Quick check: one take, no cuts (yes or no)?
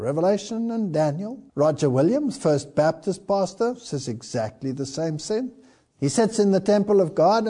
no